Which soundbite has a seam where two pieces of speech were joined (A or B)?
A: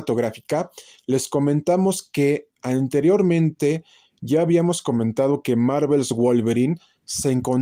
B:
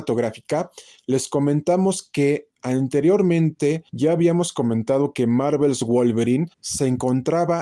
B